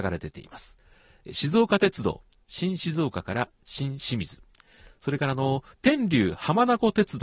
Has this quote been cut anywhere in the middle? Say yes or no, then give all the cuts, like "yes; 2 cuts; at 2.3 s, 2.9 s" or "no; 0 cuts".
yes; 1 cut; at 5.7 s